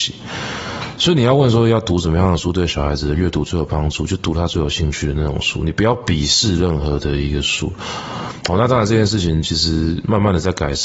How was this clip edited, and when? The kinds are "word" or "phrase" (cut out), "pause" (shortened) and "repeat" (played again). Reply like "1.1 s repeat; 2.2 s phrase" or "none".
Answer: none